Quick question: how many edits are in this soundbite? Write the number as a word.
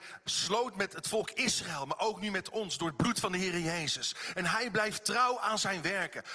zero